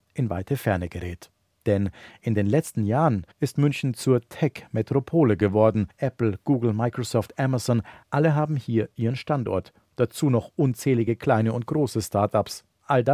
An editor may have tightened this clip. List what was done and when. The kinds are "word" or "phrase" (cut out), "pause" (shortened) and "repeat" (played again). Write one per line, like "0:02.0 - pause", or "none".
0:03.3 - pause
0:05.9 - pause